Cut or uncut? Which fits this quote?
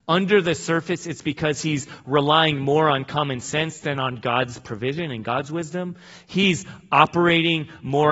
uncut